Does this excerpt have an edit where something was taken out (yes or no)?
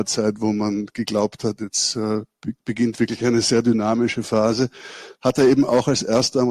yes